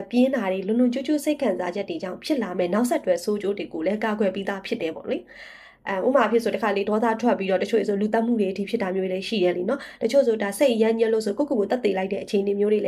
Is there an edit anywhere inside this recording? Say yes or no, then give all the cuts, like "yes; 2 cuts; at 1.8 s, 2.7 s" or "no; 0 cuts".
no; 0 cuts